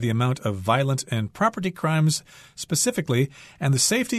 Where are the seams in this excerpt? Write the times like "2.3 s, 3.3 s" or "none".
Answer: none